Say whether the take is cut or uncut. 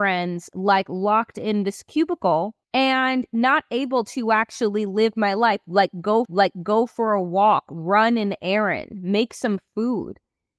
cut